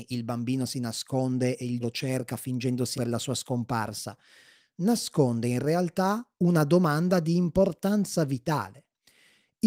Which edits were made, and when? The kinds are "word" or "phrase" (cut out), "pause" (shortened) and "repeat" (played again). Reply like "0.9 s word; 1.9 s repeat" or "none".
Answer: 1.8 s word; 3.0 s word